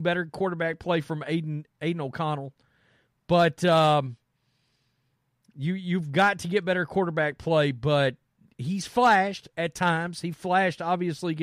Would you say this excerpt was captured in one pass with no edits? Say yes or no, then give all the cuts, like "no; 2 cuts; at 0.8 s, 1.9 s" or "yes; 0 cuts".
yes; 0 cuts